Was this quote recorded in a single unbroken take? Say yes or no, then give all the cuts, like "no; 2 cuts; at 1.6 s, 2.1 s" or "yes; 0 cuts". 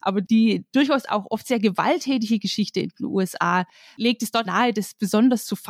no; 1 cut; at 4.5 s